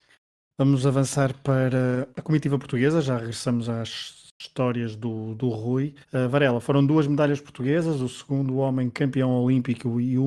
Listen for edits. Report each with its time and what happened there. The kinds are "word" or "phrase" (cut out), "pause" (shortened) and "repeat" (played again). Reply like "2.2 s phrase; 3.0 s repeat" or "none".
2.1 s pause; 6.0 s pause